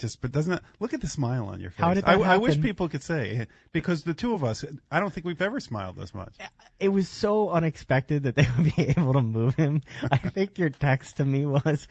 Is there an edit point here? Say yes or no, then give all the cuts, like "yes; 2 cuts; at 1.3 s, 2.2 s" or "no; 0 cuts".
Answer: no; 0 cuts